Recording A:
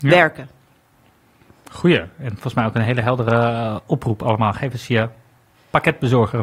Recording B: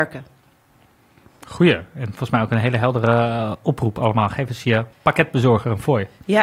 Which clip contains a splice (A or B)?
B